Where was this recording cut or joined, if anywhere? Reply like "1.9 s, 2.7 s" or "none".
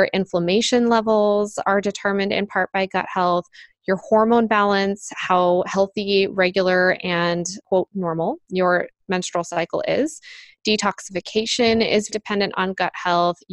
7.6 s, 12.1 s